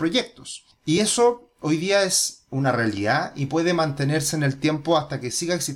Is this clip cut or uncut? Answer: uncut